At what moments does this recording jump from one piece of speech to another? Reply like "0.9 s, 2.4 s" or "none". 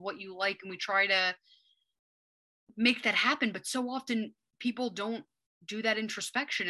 none